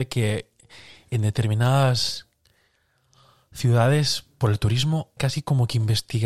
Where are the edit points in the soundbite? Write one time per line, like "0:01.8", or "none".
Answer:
0:05.2